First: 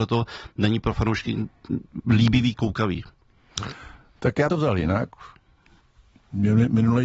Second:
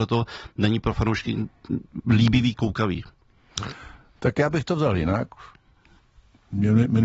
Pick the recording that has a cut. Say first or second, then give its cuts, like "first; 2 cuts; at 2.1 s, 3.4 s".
first; 1 cut; at 4.5 s